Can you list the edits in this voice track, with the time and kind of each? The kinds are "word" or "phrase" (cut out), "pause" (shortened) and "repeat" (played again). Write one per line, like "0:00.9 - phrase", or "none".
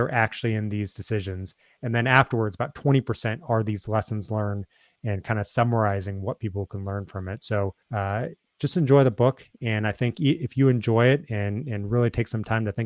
0:07.8 - pause